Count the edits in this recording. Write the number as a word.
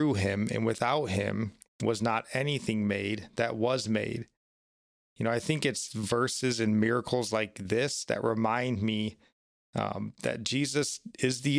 zero